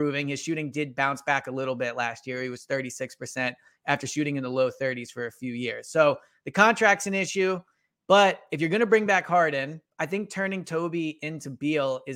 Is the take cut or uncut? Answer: uncut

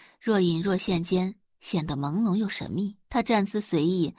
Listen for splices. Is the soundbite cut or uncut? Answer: cut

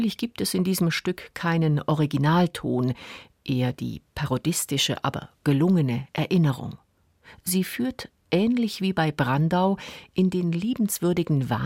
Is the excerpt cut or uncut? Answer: uncut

